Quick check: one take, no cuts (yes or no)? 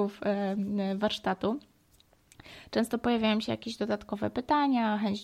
yes